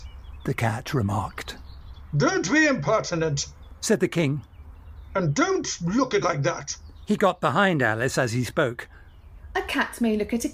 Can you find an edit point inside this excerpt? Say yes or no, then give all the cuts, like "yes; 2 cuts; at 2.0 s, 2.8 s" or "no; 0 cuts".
yes; 1 cut; at 6.2 s